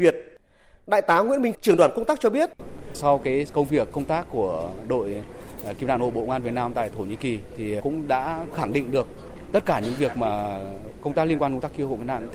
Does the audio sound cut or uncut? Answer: cut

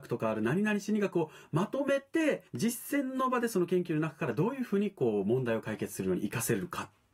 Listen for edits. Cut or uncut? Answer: cut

